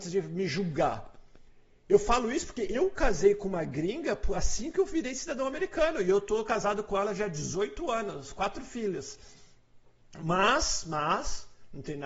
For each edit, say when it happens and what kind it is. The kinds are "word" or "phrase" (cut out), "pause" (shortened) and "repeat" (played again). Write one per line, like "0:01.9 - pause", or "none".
none